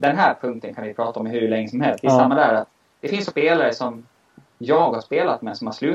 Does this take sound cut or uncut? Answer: cut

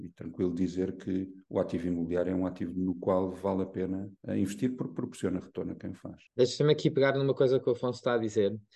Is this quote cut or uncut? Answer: cut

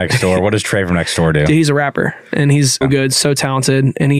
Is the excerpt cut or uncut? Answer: cut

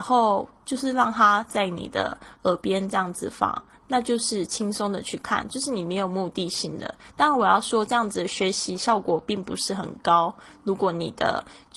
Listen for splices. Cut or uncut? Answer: uncut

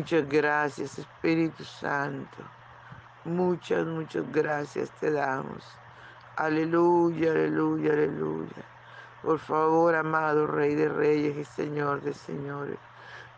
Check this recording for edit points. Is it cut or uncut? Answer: uncut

